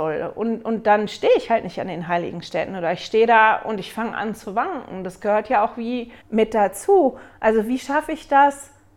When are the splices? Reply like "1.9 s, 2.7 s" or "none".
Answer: 6.2 s